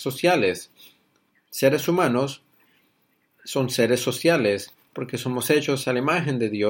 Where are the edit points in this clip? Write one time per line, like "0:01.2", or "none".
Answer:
none